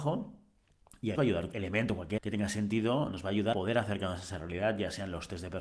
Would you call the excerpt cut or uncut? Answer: cut